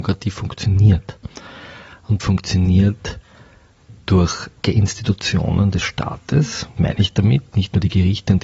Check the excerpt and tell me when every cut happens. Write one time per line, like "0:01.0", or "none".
0:02.2
0:04.6
0:06.8